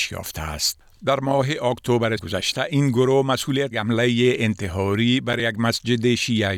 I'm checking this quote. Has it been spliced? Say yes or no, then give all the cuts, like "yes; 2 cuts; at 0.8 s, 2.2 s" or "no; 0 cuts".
yes; 2 cuts; at 2.2 s, 3.7 s